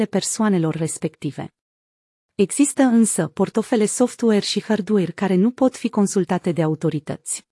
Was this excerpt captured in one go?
yes; 0 cuts

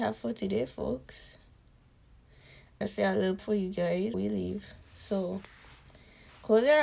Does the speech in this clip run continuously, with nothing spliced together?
no; 3 cuts; at 2.8 s, 3.4 s, 4.1 s

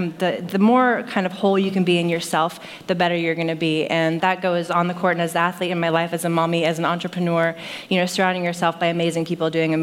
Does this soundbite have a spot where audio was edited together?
yes; 1 cut; at 4.2 s

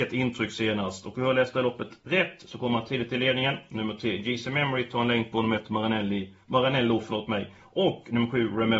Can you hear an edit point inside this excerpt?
no; 0 cuts

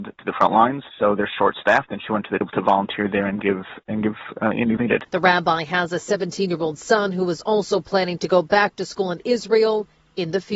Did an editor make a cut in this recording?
yes; 2 cuts; at 2.4 s, 4.8 s

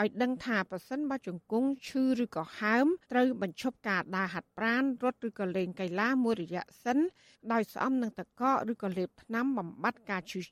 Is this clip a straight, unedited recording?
no; 1 cut; at 3.0 s

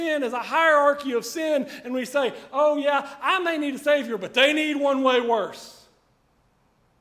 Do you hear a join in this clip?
no; 0 cuts

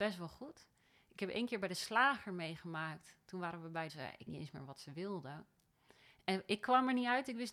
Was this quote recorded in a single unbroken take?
no; 2 cuts; at 3.9 s, 4.3 s

